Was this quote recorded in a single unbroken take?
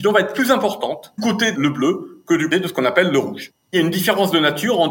no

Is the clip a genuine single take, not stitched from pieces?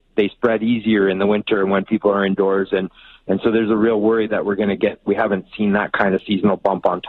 yes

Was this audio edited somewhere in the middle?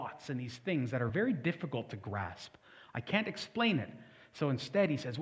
no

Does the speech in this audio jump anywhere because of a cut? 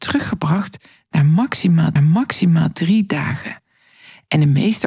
yes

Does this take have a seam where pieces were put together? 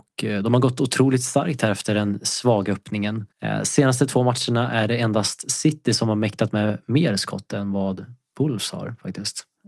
yes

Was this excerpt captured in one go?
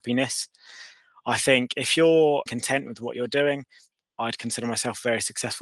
no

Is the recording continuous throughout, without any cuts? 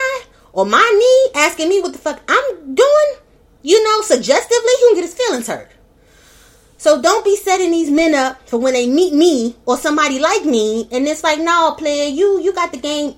yes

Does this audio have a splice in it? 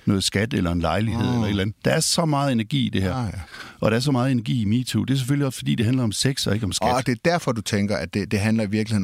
no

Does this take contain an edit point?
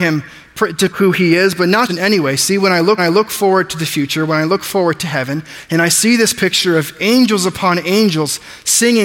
yes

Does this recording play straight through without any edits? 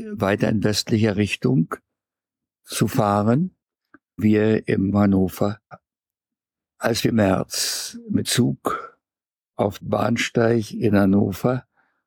no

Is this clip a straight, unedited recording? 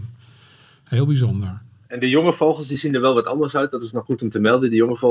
no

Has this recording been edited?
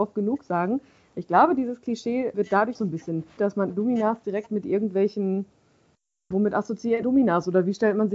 yes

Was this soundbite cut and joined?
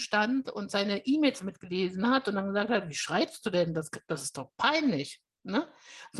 no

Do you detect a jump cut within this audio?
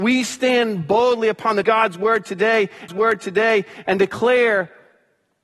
yes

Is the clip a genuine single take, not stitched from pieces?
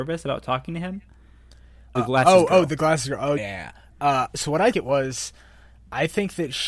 no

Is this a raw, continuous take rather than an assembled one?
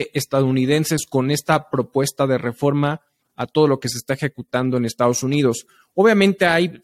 yes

